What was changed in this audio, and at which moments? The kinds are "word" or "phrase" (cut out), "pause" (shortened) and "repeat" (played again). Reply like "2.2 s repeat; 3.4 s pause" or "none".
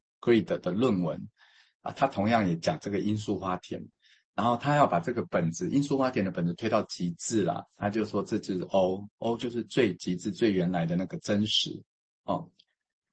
none